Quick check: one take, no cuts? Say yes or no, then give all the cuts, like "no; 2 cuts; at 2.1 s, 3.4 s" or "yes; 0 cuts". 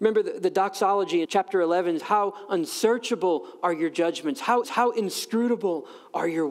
no; 3 cuts; at 1.3 s, 2.0 s, 4.6 s